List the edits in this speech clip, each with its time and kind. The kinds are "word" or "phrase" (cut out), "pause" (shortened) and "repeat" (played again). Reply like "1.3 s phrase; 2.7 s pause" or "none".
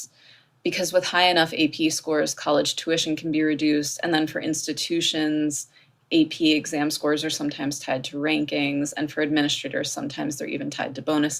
none